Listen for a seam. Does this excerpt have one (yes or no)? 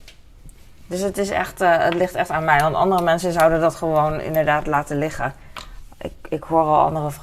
no